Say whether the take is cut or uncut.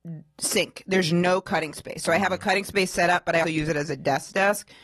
cut